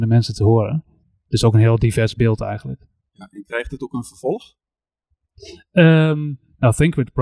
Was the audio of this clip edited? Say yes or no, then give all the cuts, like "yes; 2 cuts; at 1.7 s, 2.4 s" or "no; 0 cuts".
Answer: no; 0 cuts